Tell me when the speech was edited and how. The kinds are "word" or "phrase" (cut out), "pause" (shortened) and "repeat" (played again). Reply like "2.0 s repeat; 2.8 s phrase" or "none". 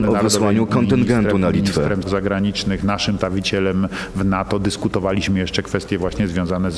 2.0 s word; 3.2 s word